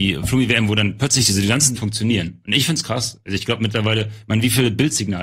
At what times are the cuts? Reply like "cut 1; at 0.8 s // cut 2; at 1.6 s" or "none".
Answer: cut 1; at 1.7 s